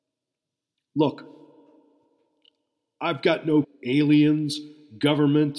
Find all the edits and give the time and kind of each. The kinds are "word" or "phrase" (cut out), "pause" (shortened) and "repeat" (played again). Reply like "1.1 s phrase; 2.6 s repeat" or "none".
3.6 s phrase